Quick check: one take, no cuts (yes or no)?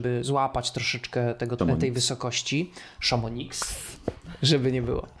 no